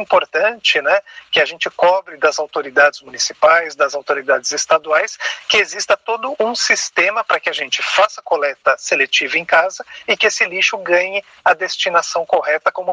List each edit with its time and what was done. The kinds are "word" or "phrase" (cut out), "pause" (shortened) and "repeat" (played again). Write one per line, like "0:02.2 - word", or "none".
none